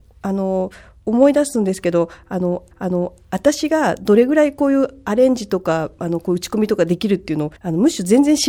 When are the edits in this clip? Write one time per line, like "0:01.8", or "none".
0:02.7
0:07.6